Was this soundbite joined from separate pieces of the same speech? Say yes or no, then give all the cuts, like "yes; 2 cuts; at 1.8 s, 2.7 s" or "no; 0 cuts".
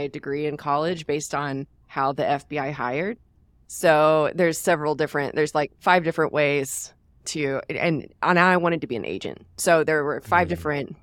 yes; 1 cut; at 5.7 s